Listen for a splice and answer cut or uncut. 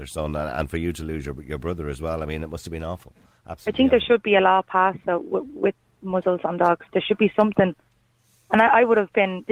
uncut